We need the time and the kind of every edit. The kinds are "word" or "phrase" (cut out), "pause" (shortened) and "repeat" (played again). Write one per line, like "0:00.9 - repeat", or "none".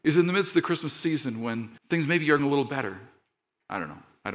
0:01.8 - pause
0:02.4 - word